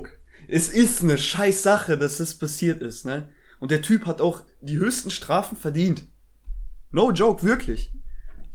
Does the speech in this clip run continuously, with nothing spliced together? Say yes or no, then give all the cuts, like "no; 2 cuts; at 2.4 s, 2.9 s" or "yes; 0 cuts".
yes; 0 cuts